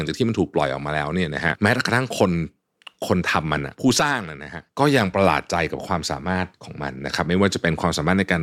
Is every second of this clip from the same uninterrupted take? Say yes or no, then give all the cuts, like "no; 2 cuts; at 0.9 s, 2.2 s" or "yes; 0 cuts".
yes; 0 cuts